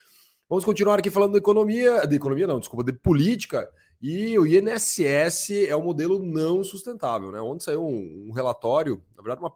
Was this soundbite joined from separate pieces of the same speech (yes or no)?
no